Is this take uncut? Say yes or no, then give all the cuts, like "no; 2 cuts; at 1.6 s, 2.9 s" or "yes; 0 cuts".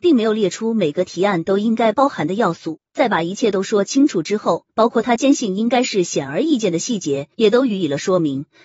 no; 3 cuts; at 2.9 s, 4.7 s, 7.3 s